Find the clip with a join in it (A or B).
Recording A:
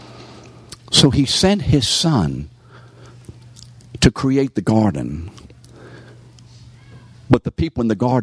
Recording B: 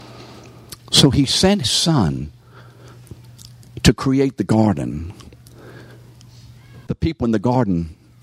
B